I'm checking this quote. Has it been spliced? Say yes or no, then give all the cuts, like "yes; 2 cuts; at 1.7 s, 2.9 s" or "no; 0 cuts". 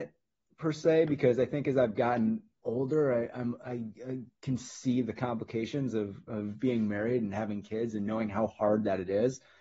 yes; 1 cut; at 2.5 s